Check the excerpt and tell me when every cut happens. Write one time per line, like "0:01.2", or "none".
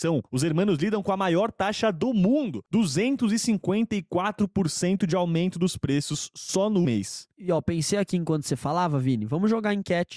0:06.8